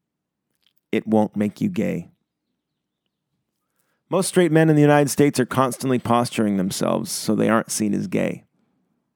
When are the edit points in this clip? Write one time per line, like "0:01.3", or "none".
none

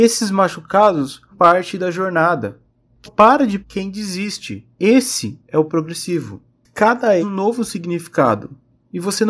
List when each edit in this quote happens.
0:01.3
0:03.0
0:03.6
0:04.7
0:05.7
0:07.2

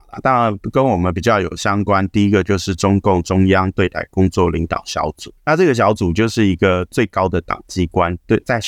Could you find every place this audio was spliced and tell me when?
0:05.4

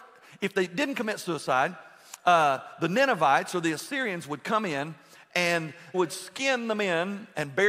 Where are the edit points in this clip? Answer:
0:05.9

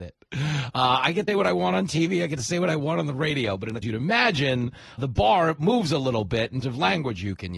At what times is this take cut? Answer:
0:01.3
0:03.8
0:05.0
0:06.6

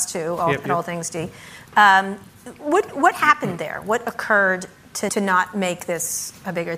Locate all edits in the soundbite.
0:05.1

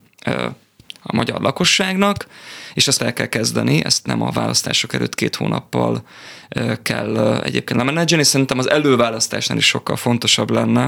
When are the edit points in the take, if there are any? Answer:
0:03.0

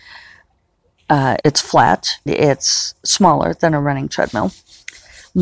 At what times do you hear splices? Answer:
0:01.4
0:02.3

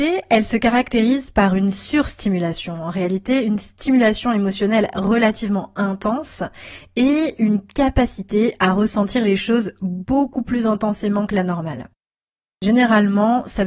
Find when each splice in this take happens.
none

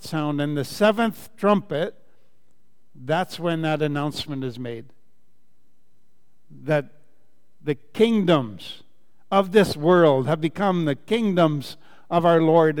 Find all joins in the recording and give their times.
none

